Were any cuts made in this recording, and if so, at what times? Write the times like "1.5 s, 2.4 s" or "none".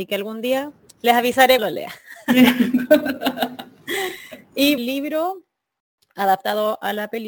1.6 s, 4.8 s